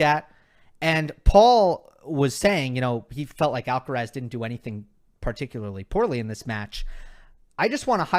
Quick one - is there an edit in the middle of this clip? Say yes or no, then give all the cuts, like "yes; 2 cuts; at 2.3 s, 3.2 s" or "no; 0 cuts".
no; 0 cuts